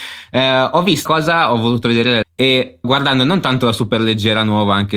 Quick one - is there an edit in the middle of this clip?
yes; 3 cuts; at 1.1 s, 2.2 s, 2.8 s

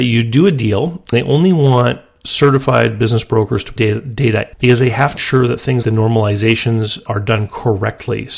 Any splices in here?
yes; 6 cuts; at 1.1 s, 3.8 s, 4.5 s, 5.2 s, 5.8 s, 7.1 s

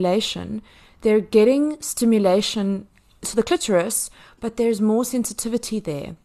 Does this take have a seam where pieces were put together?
yes; 1 cut; at 3.2 s

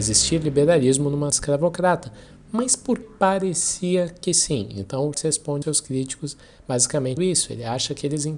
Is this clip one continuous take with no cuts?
no; 5 cuts; at 1.3 s, 3.0 s, 5.1 s, 5.6 s, 7.2 s

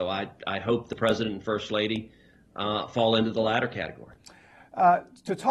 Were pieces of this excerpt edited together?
no; 0 cuts

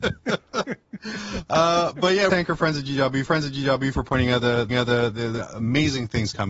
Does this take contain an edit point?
yes; 3 cuts; at 2.3 s, 3.3 s, 4.7 s

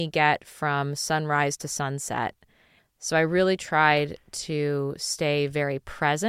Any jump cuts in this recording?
no; 0 cuts

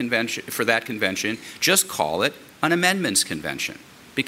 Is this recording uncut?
yes; 0 cuts

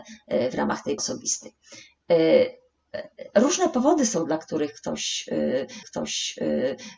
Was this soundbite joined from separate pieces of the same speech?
yes; 2 cuts; at 1.0 s, 5.8 s

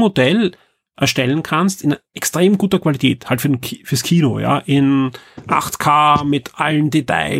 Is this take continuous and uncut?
yes; 0 cuts

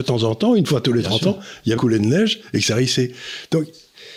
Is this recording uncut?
no; 1 cut; at 1.8 s

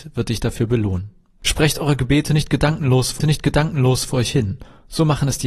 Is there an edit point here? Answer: yes; 1 cut; at 3.2 s

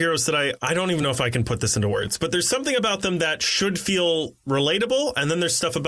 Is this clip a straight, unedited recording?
yes; 0 cuts

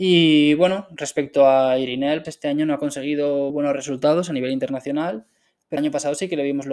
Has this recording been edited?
yes; 3 cuts; at 2.2 s, 3.5 s, 5.8 s

